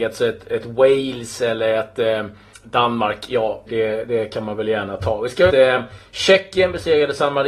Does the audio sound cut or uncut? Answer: cut